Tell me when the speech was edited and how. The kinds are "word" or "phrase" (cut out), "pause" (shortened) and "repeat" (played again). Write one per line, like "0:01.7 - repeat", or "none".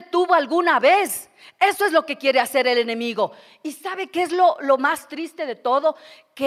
none